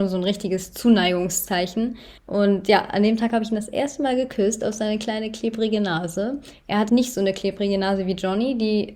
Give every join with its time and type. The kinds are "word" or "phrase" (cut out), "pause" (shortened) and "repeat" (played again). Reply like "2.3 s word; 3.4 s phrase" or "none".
2.2 s pause; 6.9 s word